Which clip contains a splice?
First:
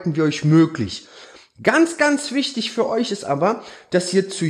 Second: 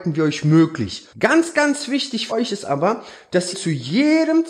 second; 3 cuts; at 1.1 s, 2.3 s, 3.5 s

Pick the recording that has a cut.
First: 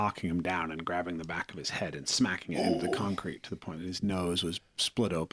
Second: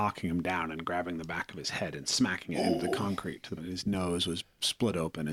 second; 1 cut; at 3.6 s

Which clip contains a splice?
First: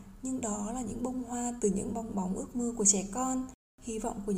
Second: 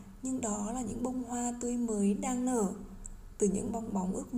first; 1 cut; at 1.6 s

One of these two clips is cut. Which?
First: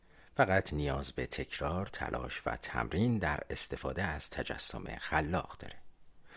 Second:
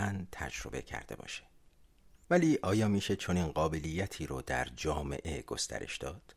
second; 1 cut; at 2.2 s

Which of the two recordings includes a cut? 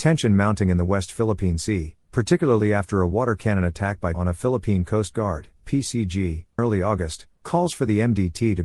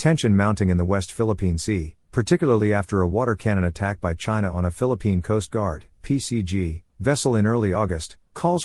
first; 2 cuts; at 4.1 s, 6.6 s

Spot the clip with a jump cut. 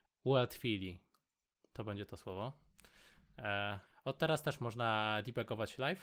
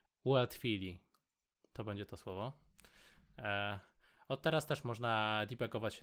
first; 1 cut; at 3.9 s

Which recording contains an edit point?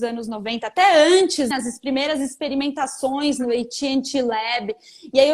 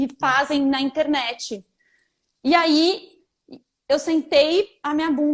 first; 1 cut; at 1.5 s

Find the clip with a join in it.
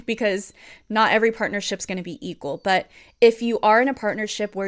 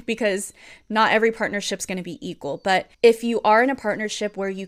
second; 1 cut; at 2.9 s

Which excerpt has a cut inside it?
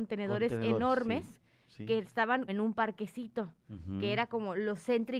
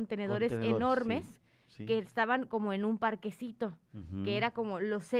first; 1 cut; at 2.5 s

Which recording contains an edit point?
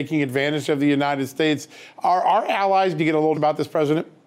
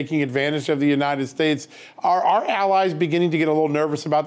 first; 2 cuts; at 3.0 s, 3.3 s

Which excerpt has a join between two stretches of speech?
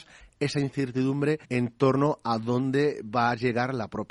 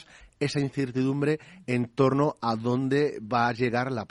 first; 1 cut; at 1.4 s

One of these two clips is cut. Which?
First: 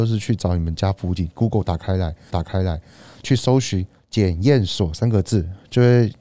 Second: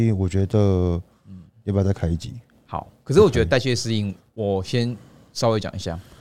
first; 1 cut; at 2.3 s

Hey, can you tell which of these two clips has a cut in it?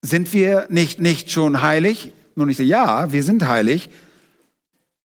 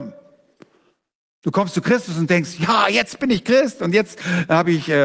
first; 2 cuts; at 1.0 s, 2.6 s

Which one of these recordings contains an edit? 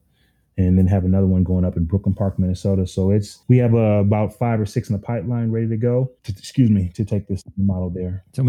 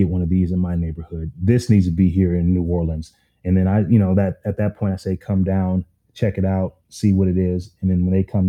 first; 2 cuts; at 3.4 s, 6.2 s

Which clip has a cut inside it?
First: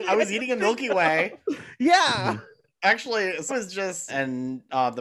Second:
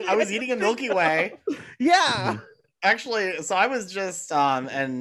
first; 2 cuts; at 3.5 s, 4.1 s

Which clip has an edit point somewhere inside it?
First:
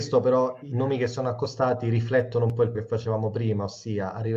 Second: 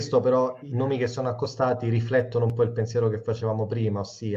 first; 1 cut; at 2.7 s

